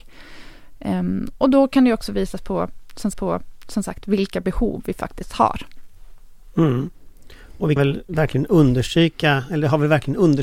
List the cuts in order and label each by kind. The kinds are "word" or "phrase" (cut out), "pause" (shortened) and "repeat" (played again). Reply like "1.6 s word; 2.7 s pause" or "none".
3.1 s repeat; 7.8 s word